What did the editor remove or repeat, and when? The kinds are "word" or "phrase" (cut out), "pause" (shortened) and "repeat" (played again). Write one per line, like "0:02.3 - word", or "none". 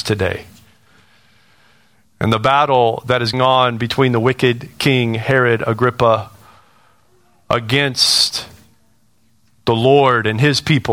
0:03.3 - word